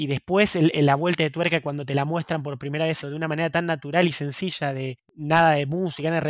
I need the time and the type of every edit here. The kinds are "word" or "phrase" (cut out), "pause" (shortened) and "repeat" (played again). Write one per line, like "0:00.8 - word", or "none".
0:03.0 - phrase